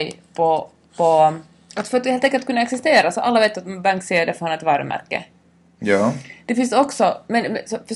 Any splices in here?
no; 0 cuts

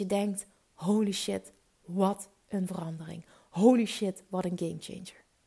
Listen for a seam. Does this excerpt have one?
no; 0 cuts

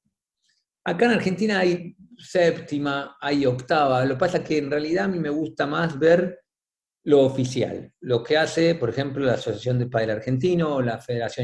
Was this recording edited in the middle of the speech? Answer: no; 0 cuts

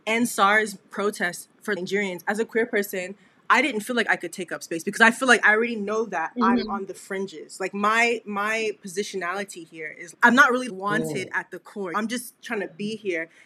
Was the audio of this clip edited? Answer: no; 0 cuts

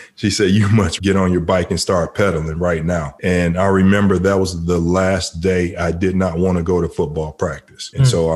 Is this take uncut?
no; 1 cut; at 1.0 s

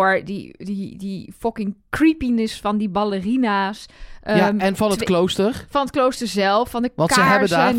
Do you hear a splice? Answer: no; 0 cuts

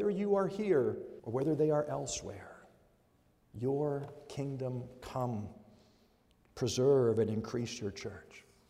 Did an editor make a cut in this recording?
yes; 1 cut; at 1.2 s

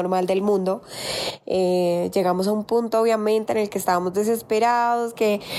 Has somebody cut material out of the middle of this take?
no; 0 cuts

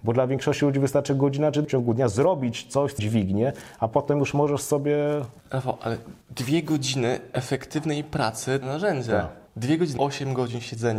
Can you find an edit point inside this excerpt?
yes; 7 cuts; at 1.6 s, 3.0 s, 5.4 s, 6.2 s, 8.6 s, 9.5 s, 10.0 s

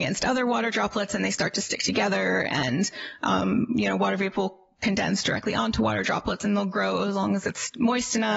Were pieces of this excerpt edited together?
no; 0 cuts

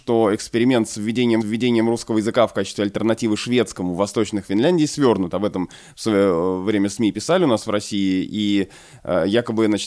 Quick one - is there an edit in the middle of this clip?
yes; 2 cuts; at 1.4 s, 4.4 s

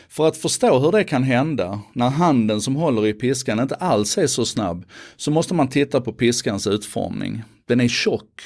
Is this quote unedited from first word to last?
yes; 0 cuts

